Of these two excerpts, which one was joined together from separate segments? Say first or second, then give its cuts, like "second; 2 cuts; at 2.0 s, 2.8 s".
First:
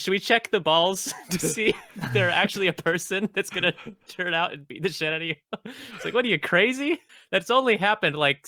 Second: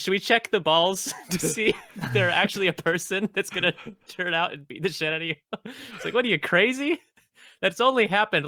first; 1 cut; at 7.1 s